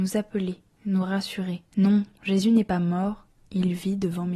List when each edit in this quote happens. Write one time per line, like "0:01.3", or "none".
0:01.7